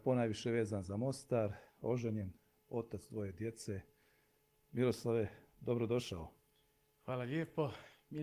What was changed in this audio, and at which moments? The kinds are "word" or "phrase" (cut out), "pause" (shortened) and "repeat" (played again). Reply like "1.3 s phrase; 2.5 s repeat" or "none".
none